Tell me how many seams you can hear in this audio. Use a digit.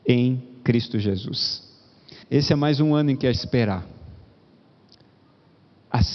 2